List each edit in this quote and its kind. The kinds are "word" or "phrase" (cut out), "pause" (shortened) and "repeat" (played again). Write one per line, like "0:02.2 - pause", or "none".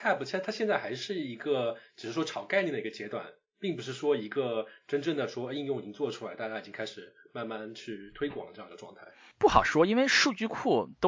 none

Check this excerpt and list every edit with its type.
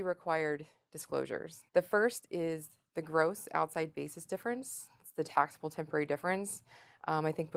0:01.7 - pause

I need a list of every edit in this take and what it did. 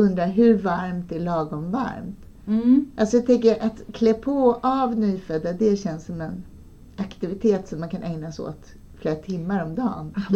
none

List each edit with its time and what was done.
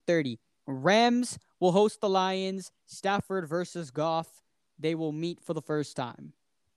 none

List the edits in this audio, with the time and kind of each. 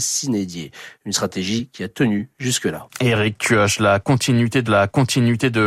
0:04.6 - repeat

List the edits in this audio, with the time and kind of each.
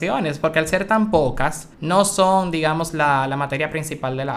0:01.7 - pause

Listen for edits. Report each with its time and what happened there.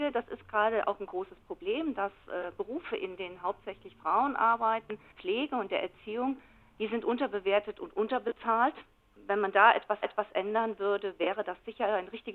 0:05.1 - phrase
0:09.1 - pause
0:10.0 - repeat

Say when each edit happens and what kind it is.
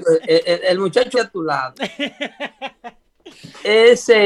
0:01.1 - word

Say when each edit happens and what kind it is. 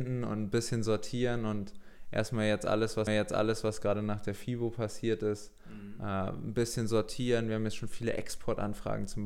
0:03.1 - repeat

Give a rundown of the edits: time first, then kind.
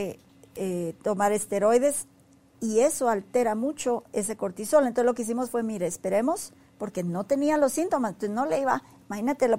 none

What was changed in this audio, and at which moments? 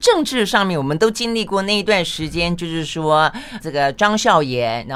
0:03.6 - word

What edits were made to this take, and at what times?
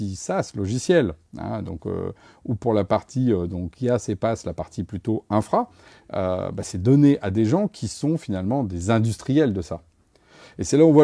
none

